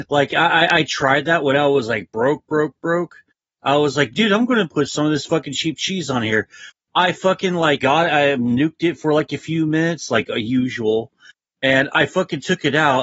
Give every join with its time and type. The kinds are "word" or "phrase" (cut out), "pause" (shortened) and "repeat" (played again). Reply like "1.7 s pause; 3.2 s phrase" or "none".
7.8 s word